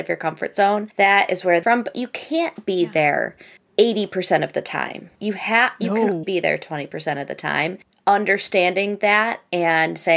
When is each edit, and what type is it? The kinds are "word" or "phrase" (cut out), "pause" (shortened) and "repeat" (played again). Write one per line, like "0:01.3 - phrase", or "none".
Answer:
0:01.6 - phrase
0:03.6 - pause
0:05.1 - pause
0:06.2 - word